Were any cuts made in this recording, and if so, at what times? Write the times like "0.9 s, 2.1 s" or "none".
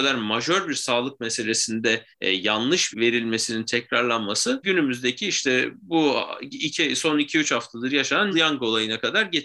2.1 s, 2.9 s, 4.6 s, 8.3 s